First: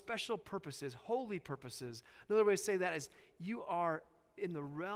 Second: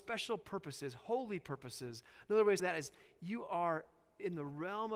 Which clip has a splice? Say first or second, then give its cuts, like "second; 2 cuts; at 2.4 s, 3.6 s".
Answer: second; 1 cut; at 2.6 s